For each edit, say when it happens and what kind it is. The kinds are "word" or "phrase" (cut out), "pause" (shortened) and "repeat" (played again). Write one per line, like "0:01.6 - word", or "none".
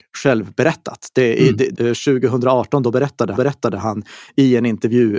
0:01.7 - word
0:03.4 - repeat